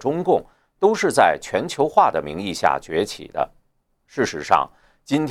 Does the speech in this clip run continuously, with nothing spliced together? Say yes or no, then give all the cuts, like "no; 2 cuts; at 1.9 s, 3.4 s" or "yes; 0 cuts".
yes; 0 cuts